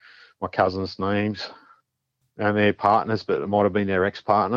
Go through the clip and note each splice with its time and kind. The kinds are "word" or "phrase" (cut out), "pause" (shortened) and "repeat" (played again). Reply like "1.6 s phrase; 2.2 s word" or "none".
none